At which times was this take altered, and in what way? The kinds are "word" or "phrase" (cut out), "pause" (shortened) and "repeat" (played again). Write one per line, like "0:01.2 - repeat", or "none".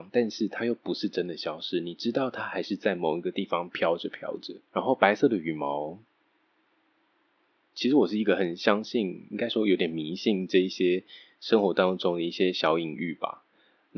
0:04.6 - pause